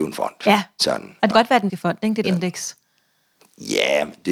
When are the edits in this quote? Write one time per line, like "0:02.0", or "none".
0:01.3
0:01.7
0:02.2